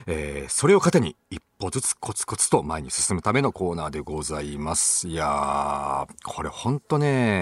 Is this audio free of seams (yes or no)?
yes